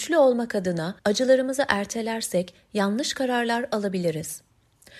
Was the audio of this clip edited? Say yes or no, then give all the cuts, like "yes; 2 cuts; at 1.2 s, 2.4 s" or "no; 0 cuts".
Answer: yes; 1 cut; at 1.0 s